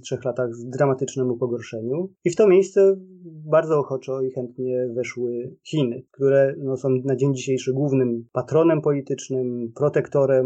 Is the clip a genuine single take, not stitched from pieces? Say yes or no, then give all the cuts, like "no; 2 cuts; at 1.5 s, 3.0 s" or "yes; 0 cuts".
no; 2 cuts; at 2.1 s, 6.1 s